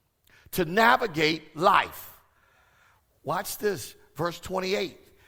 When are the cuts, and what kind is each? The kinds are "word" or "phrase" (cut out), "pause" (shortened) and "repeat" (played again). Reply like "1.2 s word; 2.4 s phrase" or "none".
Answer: none

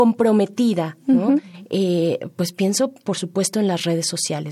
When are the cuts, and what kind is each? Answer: none

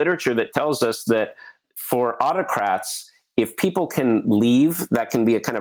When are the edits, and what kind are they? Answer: none

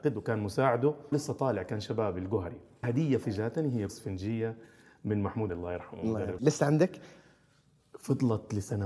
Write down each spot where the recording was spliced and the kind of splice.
1.1 s word; 2.8 s word; 3.2 s word; 3.9 s word; 5.5 s word; 6.4 s word

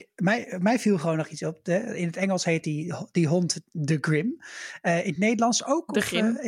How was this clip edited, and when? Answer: none

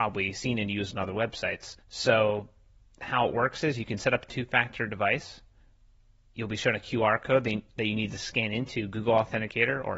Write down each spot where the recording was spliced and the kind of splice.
1.8 s pause

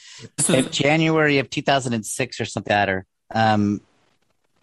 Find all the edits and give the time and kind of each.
2.7 s word; 3.1 s pause

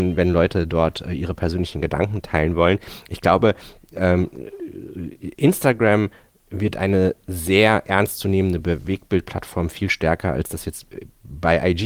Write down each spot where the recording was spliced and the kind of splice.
none

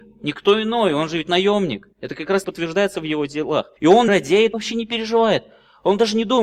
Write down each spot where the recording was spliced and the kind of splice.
1.9 s pause; 2.4 s word; 3.8 s pause; 4.1 s word; 4.5 s phrase

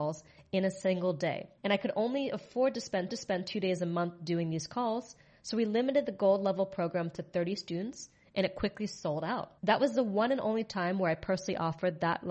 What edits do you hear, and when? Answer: 1.6 s pause; 3.1 s repeat; 9.6 s pause

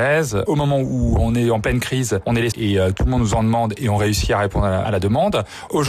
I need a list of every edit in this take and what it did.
2.5 s phrase

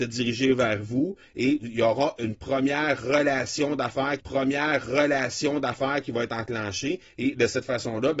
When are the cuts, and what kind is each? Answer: 4.2 s repeat

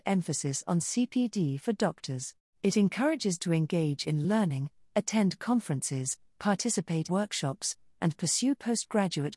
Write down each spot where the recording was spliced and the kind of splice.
2.5 s pause; 3.4 s word; 4.2 s word; 7.1 s word

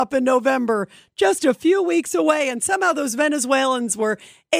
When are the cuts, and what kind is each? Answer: none

